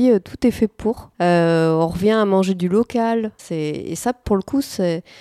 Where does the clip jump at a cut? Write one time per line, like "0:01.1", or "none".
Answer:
0:01.1
0:03.4

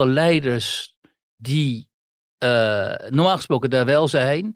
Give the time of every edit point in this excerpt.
none

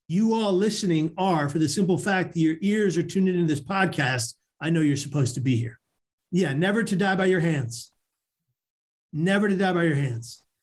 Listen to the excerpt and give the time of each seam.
none

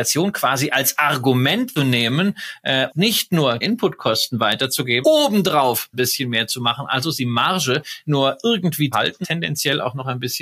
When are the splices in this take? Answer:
0:01.8
0:02.9
0:03.6
0:05.0
0:05.9
0:08.0
0:08.9
0:09.2

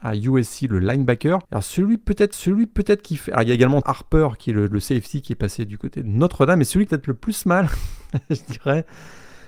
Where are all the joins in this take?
0:01.4
0:02.3
0:03.8
0:06.9

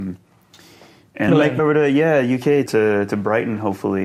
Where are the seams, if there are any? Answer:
0:01.3
0:01.6
0:02.7

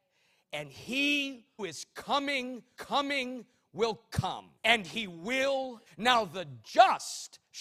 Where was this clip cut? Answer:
0:01.6
0:02.8
0:04.6
0:05.9

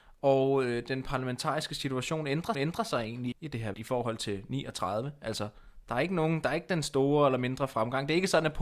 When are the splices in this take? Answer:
0:02.5
0:03.3
0:03.7

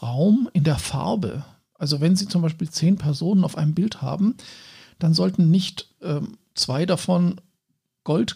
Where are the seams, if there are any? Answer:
none

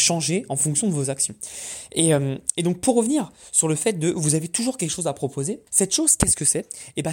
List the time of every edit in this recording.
0:05.7

